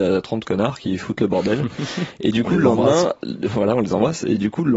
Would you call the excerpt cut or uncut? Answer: uncut